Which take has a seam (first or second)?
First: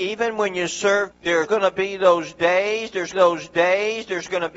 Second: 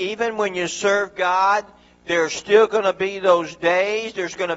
first